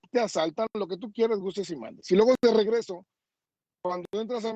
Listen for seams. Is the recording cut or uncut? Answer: uncut